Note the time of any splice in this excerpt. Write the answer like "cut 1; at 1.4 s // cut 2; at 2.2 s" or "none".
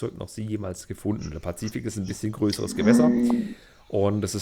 none